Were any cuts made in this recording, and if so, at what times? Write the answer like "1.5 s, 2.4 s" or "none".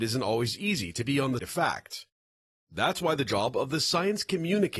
1.4 s